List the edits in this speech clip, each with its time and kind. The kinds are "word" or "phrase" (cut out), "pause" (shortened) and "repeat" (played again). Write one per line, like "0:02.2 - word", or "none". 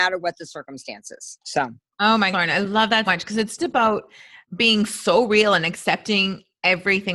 0:01.4 - pause
0:02.3 - word
0:03.1 - word
0:03.6 - word
0:04.4 - pause